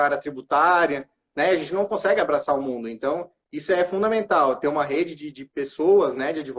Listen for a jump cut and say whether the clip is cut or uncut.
uncut